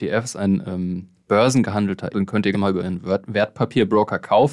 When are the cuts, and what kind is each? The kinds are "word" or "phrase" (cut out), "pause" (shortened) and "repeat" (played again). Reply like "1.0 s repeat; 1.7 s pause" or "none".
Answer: 2.1 s word; 2.5 s word